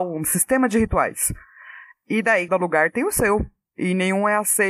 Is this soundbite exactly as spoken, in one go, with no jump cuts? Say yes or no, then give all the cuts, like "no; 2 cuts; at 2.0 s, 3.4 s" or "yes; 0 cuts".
no; 1 cut; at 2.5 s